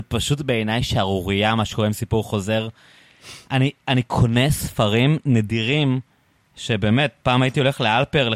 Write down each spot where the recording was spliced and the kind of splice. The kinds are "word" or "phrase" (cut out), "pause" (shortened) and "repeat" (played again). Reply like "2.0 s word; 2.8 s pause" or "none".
none